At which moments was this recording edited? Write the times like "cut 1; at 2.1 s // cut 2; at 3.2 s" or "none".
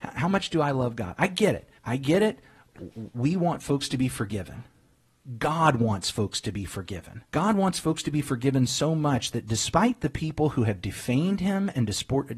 cut 1; at 1.8 s // cut 2; at 7.3 s